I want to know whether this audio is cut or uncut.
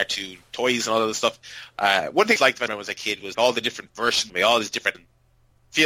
cut